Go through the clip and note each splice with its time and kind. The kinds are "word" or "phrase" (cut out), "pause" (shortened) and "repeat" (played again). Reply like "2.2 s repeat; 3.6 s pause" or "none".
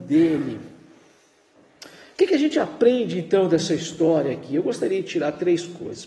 none